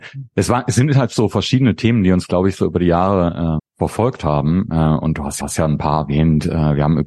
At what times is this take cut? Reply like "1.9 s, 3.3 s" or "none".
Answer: 3.6 s, 5.4 s